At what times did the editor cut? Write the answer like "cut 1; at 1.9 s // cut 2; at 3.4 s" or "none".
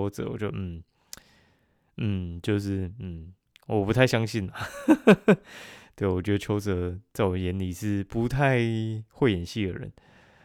none